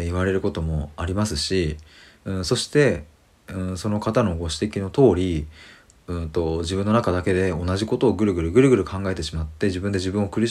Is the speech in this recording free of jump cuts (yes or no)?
yes